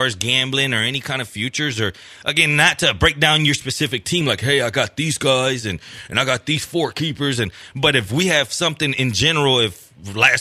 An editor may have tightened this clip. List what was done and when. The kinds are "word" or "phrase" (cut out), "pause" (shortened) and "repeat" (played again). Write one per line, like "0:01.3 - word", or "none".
none